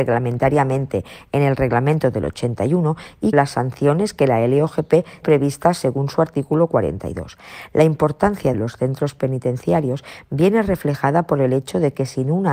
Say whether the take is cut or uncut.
cut